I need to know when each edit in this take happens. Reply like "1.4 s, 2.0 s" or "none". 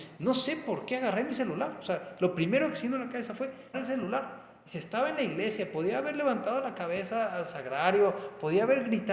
3.7 s